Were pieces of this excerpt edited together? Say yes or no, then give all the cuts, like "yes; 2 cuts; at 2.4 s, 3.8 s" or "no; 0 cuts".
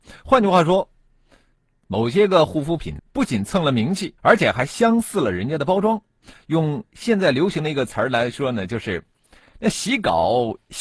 yes; 2 cuts; at 3.0 s, 4.2 s